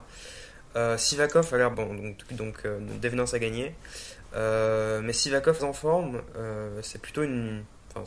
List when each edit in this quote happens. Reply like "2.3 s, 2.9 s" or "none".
1.7 s, 5.6 s